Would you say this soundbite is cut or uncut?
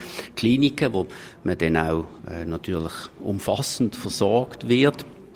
cut